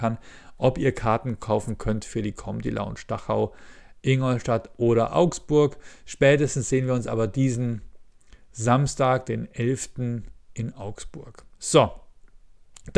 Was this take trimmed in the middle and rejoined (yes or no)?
no